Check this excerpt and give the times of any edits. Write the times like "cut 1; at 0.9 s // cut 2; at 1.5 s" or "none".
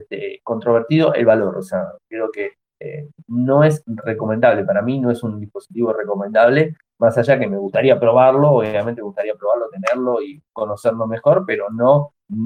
cut 1; at 10.5 s